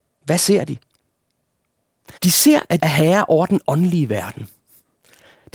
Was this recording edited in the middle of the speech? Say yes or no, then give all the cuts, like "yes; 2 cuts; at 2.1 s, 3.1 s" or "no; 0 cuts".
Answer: yes; 2 cuts; at 2.2 s, 2.8 s